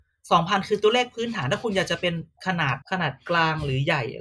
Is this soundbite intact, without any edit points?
no; 1 cut; at 2.8 s

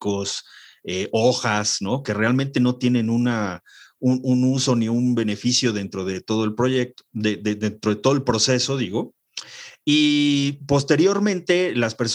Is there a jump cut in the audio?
no; 0 cuts

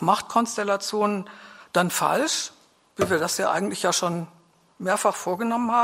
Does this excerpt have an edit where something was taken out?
no; 0 cuts

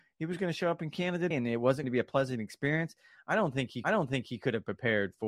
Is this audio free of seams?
no; 3 cuts; at 1.3 s, 1.8 s, 3.8 s

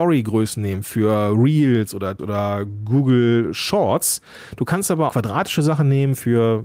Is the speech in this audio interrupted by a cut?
yes; 2 cuts; at 2.2 s, 5.1 s

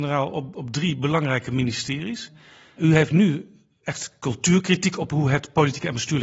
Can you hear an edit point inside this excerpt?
no; 0 cuts

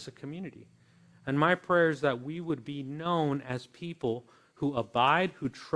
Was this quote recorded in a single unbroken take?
yes; 0 cuts

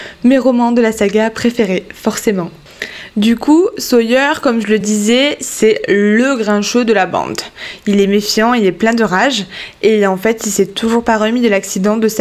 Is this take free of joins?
yes; 0 cuts

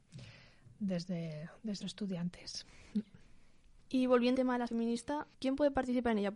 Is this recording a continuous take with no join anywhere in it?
no; 4 cuts; at 1.8 s, 4.3 s, 4.7 s, 5.3 s

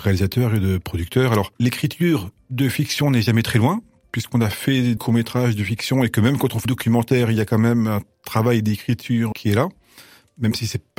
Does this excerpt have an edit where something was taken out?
yes; 3 cuts; at 5.0 s, 6.6 s, 9.3 s

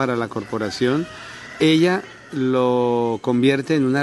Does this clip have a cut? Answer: no; 0 cuts

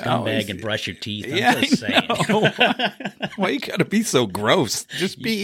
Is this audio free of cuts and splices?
yes; 0 cuts

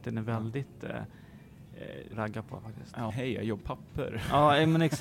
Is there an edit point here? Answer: yes; 3 cuts; at 2.1 s, 3.1 s, 3.6 s

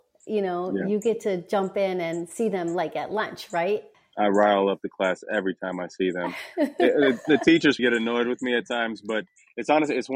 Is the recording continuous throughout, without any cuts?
no; 2 cuts; at 3.9 s, 7.8 s

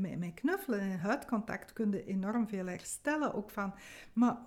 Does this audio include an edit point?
no; 0 cuts

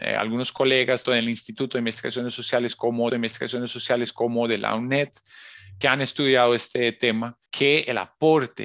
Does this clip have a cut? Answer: yes; 4 cuts; at 1.0 s, 3.1 s, 5.8 s, 7.5 s

